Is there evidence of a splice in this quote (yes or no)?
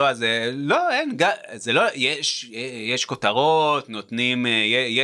no